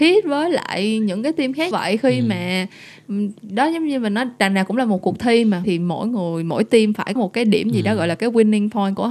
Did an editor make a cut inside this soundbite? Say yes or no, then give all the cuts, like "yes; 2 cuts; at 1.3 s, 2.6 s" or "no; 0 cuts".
yes; 3 cuts; at 1.7 s, 5.6 s, 7.2 s